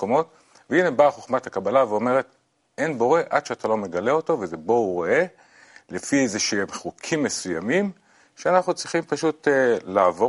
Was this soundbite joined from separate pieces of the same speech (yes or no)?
no